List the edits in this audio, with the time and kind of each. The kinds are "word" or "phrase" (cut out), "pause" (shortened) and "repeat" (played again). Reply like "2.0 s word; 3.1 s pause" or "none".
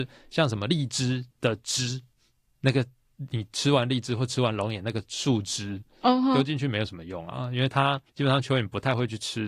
1.3 s pause; 8.1 s pause